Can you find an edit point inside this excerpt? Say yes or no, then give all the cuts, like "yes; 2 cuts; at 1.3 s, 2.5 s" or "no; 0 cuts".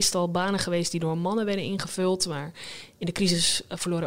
no; 0 cuts